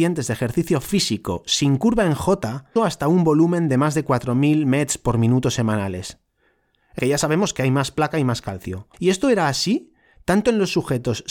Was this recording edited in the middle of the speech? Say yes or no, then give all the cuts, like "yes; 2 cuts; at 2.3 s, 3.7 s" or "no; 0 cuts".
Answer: yes; 3 cuts; at 2.8 s, 7.0 s, 8.9 s